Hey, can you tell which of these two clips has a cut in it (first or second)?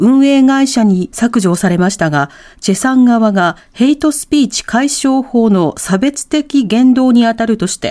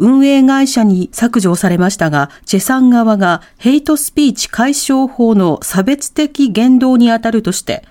second